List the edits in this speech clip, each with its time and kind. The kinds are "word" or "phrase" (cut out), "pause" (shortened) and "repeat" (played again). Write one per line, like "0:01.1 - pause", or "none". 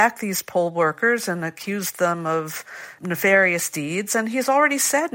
0:03.0 - word